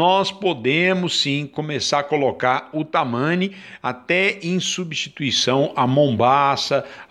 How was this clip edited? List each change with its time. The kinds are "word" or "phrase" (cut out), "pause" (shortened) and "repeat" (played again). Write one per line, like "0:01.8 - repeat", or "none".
none